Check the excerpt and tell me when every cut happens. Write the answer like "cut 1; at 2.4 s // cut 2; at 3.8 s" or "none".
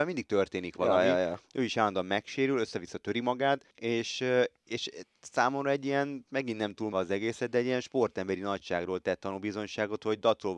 cut 1; at 3.7 s // cut 2; at 6.9 s